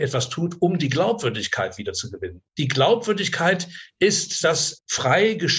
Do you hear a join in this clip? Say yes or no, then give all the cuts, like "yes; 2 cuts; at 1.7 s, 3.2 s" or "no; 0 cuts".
yes; 1 cut; at 4.4 s